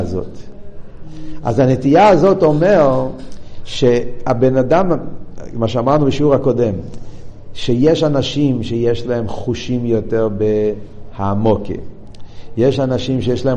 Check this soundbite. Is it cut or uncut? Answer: uncut